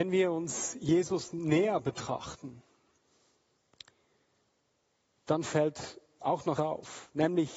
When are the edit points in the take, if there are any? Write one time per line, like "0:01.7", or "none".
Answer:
0:06.6